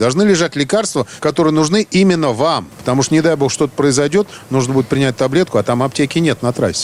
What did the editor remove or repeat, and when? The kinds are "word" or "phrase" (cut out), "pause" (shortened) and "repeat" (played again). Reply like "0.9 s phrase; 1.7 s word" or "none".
none